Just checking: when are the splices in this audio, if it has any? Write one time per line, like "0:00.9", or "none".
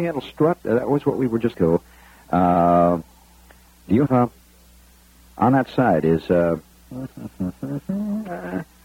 0:01.5
0:04.1